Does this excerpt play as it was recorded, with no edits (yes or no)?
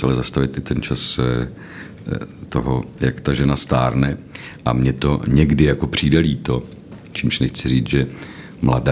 yes